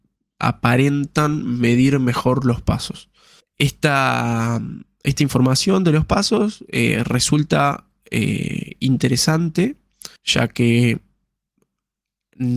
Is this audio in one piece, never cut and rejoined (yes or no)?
no